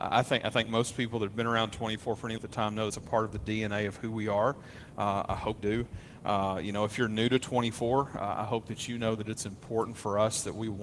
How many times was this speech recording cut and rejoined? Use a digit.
3